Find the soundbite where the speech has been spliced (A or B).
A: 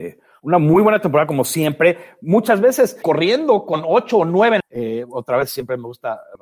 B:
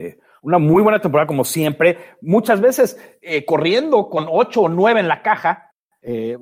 A